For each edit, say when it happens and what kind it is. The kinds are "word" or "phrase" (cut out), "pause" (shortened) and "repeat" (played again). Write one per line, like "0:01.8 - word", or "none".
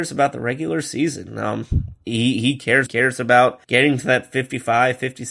0:02.9 - phrase
0:03.6 - pause

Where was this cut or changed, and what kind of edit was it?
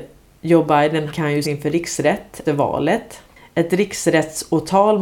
0:01.1 - word
0:01.4 - word
0:02.5 - word

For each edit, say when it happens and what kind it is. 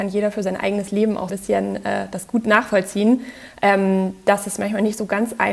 0:01.3 - phrase

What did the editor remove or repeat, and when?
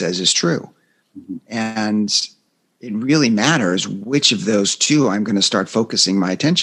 none

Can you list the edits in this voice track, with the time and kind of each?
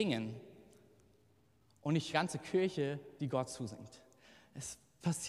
0:02.1 - phrase

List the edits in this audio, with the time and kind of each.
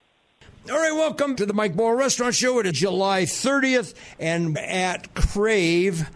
0:01.3 - word
0:02.7 - word
0:04.5 - phrase

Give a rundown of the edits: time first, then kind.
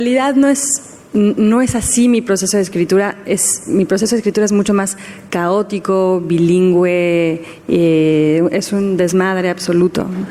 none

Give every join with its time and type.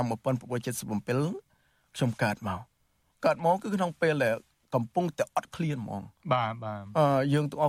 none

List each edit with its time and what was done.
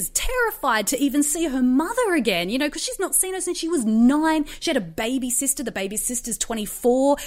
none

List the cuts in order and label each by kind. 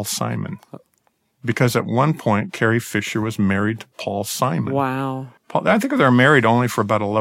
0:05.4 - pause

